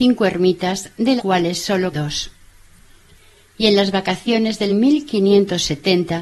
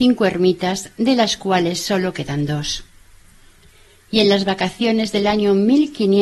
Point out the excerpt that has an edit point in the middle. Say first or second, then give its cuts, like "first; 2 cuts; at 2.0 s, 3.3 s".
first; 3 cuts; at 1.2 s, 1.9 s, 4.7 s